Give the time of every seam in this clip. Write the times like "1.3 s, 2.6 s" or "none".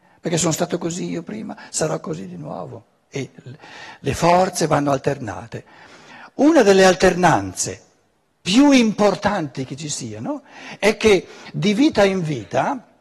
none